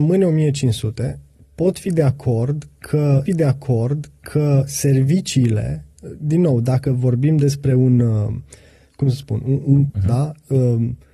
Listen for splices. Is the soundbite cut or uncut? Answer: cut